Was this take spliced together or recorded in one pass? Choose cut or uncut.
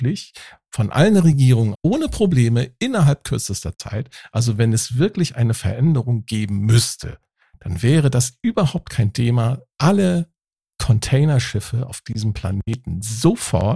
cut